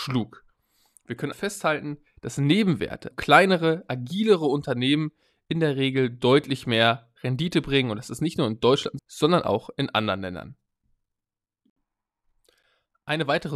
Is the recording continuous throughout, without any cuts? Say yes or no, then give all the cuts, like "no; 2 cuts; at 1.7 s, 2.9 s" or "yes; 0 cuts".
no; 3 cuts; at 1.3 s, 3.1 s, 9.0 s